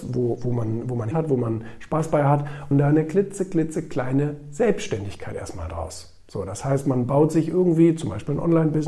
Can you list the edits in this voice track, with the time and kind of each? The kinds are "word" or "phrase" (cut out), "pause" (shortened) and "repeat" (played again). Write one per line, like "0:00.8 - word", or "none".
0:01.1 - word
0:02.7 - phrase